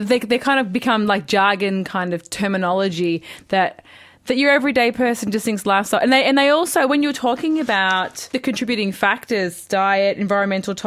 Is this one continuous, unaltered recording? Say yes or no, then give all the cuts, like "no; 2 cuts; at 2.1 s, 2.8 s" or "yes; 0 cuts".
yes; 0 cuts